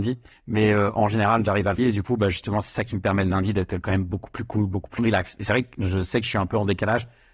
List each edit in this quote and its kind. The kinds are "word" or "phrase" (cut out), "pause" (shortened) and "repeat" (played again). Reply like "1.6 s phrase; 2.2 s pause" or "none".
1.8 s phrase; 5.0 s word

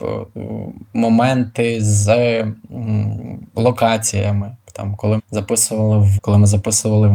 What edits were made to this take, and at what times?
4.6 s pause; 5.2 s word; 6.2 s word

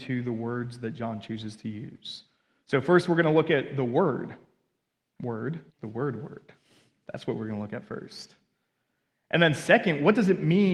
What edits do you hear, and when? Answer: 5.7 s pause

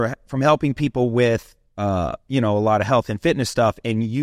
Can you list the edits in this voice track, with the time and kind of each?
none

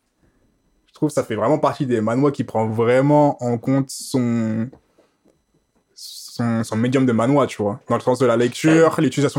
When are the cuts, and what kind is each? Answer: none

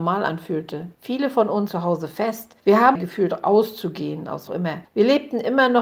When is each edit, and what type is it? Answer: 0.9 s pause; 1.7 s word; 3.0 s phrase; 4.5 s phrase

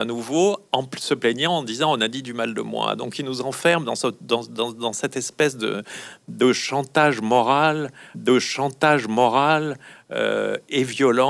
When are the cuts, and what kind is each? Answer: 8.1 s repeat

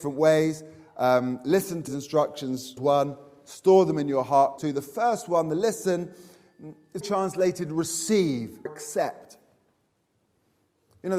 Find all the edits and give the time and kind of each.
1.9 s word; 2.8 s word; 4.6 s word; 7.0 s word; 8.7 s word

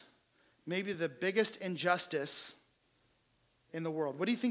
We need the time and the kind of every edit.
none

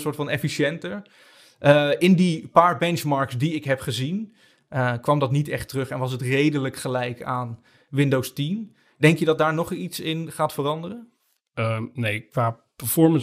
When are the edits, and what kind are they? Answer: none

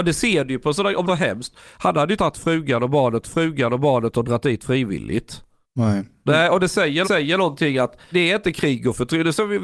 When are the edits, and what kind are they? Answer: 1.1 s phrase; 2.2 s phrase; 3.2 s repeat; 5.6 s pause; 7.0 s repeat; 8.1 s word

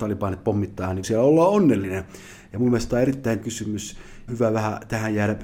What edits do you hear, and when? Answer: 1.0 s word; 3.4 s word; 4.3 s word

